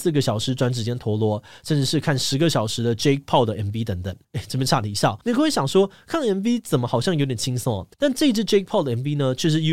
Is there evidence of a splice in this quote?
yes; 3 cuts; at 4.2 s, 5.2 s, 7.9 s

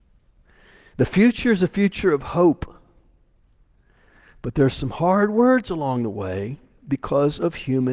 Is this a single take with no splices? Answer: yes; 0 cuts

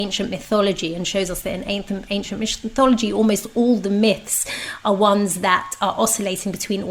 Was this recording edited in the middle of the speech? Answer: no; 0 cuts

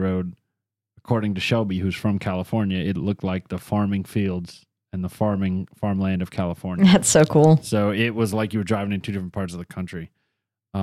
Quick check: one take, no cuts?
yes; 0 cuts

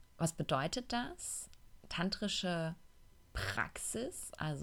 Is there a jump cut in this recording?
no; 0 cuts

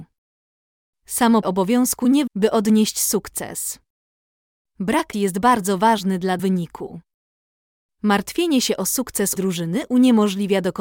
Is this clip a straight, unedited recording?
no; 5 cuts; at 1.4 s, 2.3 s, 5.1 s, 6.4 s, 9.4 s

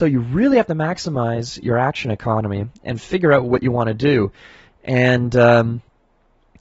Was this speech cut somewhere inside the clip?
no; 0 cuts

